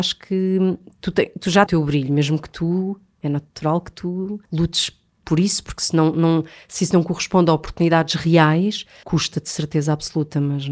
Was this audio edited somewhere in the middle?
yes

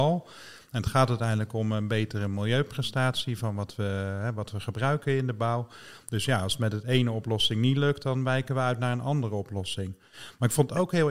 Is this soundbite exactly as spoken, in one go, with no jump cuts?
yes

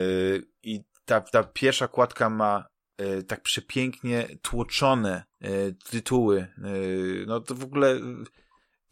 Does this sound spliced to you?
yes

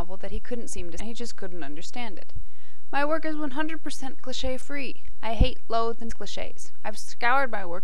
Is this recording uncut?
no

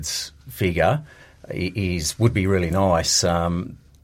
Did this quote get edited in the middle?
no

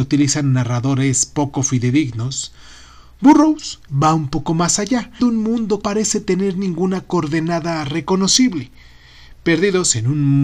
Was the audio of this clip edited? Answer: yes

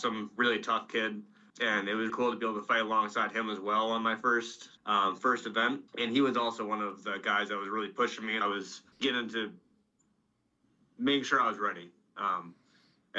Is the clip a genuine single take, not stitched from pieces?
no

